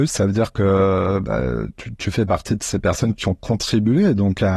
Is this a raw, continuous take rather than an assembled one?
yes; 0 cuts

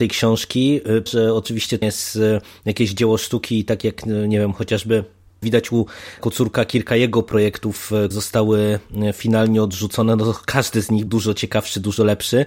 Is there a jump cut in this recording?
yes; 6 cuts; at 1.1 s, 1.8 s, 5.4 s, 6.2 s, 8.1 s, 11.1 s

